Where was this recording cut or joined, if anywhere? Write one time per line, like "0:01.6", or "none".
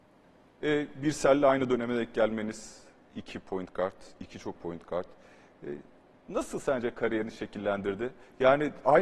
0:04.5